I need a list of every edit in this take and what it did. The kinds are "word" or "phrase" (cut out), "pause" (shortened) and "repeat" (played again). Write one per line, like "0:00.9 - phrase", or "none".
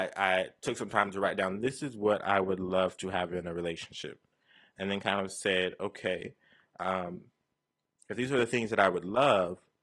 none